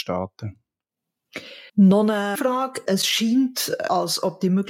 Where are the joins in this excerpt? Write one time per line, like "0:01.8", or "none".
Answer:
0:01.7
0:02.3